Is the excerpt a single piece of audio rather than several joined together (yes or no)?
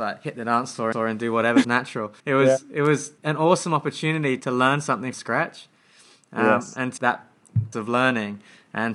no